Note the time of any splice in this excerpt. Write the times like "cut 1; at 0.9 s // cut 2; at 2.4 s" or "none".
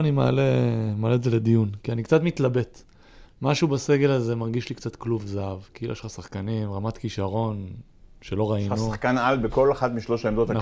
none